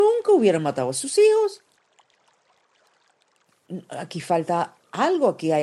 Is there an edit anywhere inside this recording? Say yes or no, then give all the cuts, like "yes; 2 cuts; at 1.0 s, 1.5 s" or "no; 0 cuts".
no; 0 cuts